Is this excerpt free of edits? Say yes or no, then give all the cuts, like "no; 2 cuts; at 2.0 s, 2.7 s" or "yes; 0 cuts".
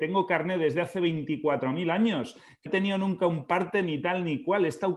no; 1 cut; at 2.7 s